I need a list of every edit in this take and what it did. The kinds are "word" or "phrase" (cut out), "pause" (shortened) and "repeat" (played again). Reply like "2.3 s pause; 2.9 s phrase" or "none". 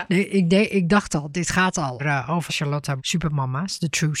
2.0 s word; 2.5 s word; 3.0 s word